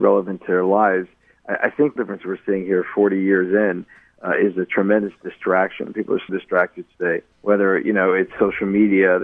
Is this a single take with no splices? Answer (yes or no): no